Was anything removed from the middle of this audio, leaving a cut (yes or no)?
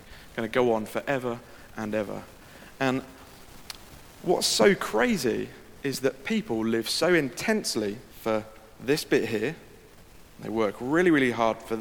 yes